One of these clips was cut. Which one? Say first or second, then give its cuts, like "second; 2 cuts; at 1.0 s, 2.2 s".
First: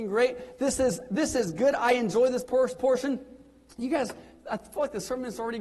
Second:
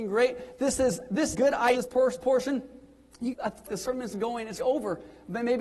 second; 6 cuts; at 1.3 s, 1.7 s, 3.3 s, 3.7 s, 4.1 s, 4.6 s